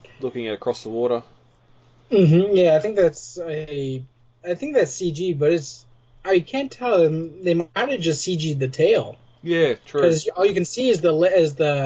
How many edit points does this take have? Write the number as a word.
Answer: zero